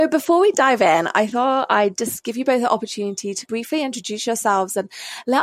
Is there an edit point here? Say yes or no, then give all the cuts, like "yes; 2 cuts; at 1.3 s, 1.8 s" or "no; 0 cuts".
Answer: no; 0 cuts